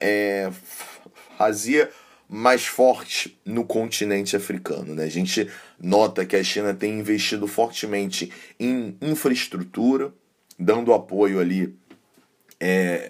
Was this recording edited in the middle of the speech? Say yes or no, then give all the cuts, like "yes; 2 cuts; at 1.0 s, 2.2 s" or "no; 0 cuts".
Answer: no; 0 cuts